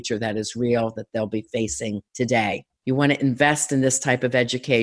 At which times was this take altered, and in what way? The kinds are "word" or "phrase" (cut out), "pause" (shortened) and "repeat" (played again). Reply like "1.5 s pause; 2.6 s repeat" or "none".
2.7 s pause